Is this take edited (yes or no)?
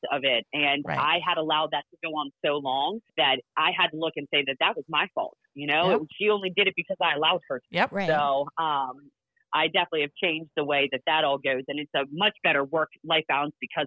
yes